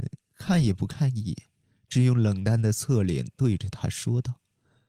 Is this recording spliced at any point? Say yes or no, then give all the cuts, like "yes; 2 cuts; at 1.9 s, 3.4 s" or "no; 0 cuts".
no; 0 cuts